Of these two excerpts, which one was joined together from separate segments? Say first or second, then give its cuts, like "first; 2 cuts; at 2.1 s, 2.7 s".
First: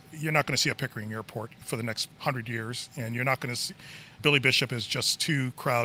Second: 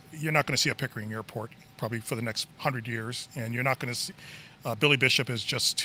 first; 2 cuts; at 1.6 s, 4.2 s